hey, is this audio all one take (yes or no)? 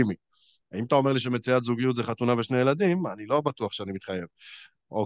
yes